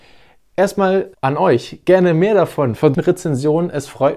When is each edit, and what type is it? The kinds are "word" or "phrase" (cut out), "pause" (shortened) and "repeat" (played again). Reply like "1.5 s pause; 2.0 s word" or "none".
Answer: 1.1 s pause; 2.9 s word